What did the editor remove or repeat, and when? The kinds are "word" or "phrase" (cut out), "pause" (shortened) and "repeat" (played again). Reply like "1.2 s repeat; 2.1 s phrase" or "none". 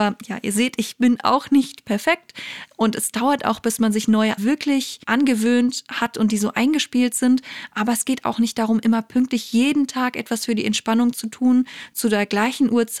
4.4 s word; 5.0 s pause